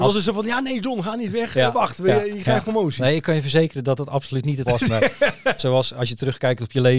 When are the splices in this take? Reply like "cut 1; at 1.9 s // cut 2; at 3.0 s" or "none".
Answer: cut 1; at 4.7 s // cut 2; at 5.6 s